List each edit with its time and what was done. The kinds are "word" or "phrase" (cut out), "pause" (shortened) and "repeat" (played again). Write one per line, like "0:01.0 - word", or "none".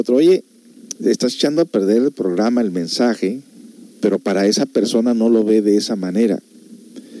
0:01.0 - pause
0:03.9 - pause